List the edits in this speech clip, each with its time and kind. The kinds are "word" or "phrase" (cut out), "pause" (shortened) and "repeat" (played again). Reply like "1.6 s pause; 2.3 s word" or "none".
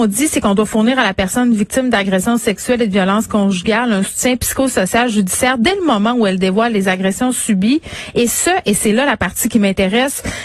none